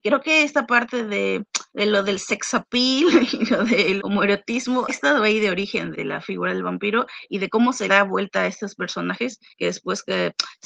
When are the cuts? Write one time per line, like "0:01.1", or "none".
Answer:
0:01.7
0:04.0
0:04.9
0:05.9
0:07.9
0:09.5